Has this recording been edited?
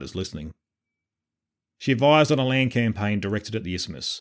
no; 0 cuts

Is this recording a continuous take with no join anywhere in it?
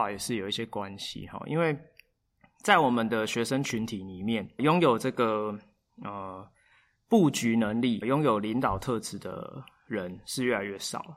no; 2 cuts; at 4.6 s, 8.0 s

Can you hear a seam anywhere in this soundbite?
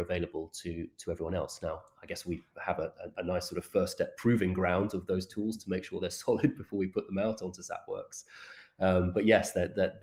no; 0 cuts

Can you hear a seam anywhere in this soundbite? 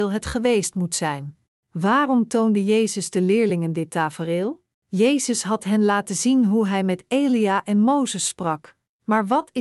yes; 2 cuts; at 1.5 s, 4.7 s

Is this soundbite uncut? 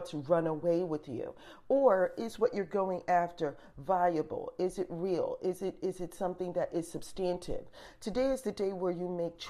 yes; 0 cuts

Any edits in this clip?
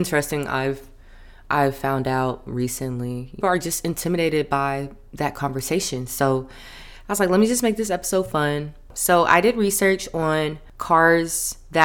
yes; 1 cut; at 3.4 s

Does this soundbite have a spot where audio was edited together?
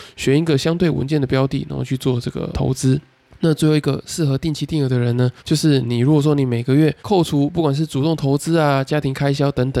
yes; 4 cuts; at 2.5 s, 3.3 s, 5.4 s, 7.0 s

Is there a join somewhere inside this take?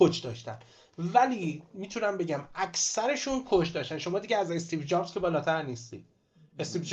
no; 0 cuts

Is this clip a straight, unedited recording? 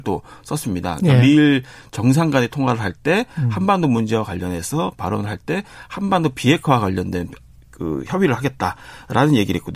yes; 0 cuts

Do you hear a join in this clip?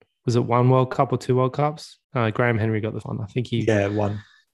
yes; 2 cuts; at 2.0 s, 3.0 s

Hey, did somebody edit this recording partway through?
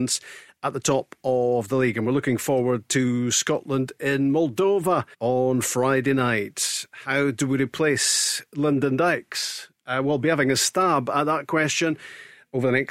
yes; 1 cut; at 5.1 s

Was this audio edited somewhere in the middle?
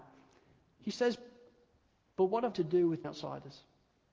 yes; 2 cuts; at 2.5 s, 3.0 s

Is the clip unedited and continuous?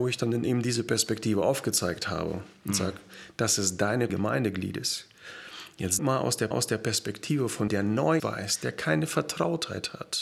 no; 5 cuts; at 4.1 s, 6.0 s, 6.5 s, 7.7 s, 8.2 s

